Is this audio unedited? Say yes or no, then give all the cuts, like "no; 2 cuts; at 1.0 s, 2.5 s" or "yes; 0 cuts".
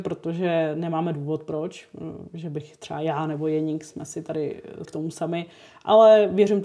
no; 1 cut; at 4.8 s